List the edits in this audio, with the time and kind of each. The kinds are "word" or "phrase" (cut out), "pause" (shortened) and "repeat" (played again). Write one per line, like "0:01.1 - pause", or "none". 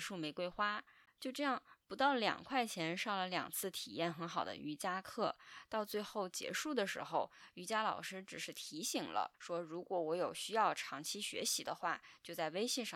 0:09.3 - pause